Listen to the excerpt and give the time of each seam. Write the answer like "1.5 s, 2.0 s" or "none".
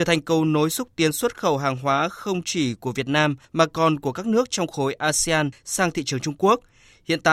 none

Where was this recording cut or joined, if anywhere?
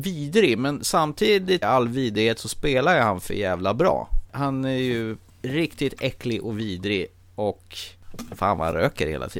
1.6 s

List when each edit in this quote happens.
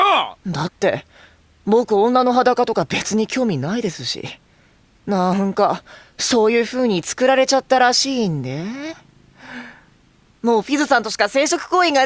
none

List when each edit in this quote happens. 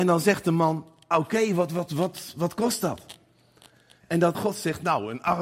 1.1 s, 4.3 s

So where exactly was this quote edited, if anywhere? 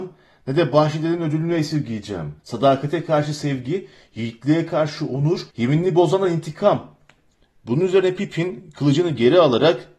2.4 s, 5.5 s

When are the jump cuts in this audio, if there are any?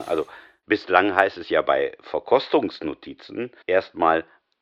3.6 s

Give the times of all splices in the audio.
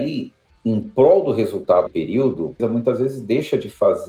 1.9 s, 2.6 s

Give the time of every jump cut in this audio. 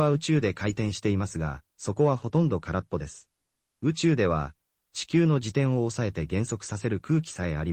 1.7 s, 3.4 s

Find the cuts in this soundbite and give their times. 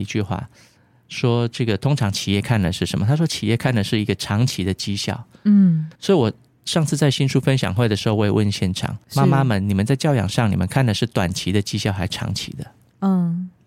5.9 s, 9.0 s

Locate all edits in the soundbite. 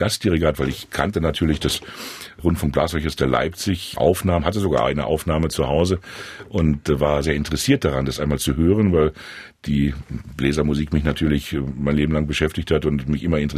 4.0 s, 7.2 s

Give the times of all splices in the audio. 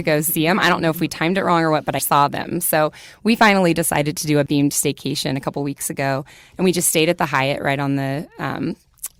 2.0 s, 4.5 s

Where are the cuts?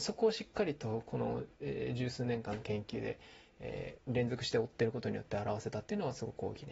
4.0 s

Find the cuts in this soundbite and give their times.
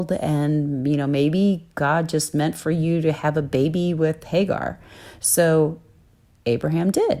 none

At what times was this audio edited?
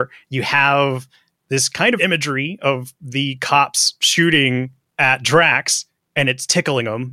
2.0 s

